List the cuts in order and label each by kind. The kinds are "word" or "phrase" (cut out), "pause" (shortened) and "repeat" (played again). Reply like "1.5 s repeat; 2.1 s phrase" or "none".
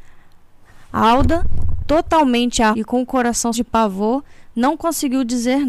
1.8 s word; 2.7 s word; 3.5 s word